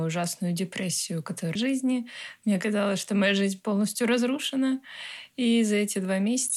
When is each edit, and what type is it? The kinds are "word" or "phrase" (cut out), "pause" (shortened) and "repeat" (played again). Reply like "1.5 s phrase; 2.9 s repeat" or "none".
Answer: 1.6 s phrase